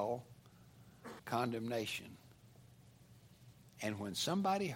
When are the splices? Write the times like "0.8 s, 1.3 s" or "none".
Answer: 1.2 s